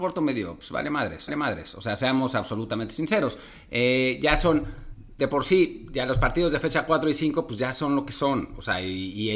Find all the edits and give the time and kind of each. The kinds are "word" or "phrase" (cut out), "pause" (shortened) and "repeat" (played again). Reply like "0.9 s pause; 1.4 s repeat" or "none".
1.3 s repeat